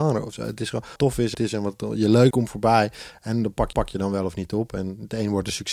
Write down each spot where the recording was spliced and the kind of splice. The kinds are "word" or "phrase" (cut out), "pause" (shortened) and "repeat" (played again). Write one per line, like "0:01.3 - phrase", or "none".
0:01.0 - word
0:01.3 - phrase
0:02.3 - word
0:03.7 - repeat